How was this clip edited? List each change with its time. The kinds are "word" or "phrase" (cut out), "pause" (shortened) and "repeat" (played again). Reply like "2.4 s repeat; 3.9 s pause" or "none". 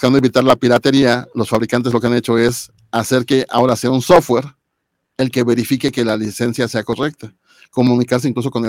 none